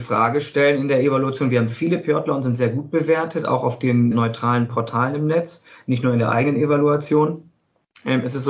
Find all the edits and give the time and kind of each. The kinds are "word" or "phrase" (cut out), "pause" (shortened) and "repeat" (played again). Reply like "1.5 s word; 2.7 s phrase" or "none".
none